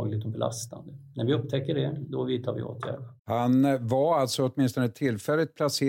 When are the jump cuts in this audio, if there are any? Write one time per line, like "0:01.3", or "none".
0:03.2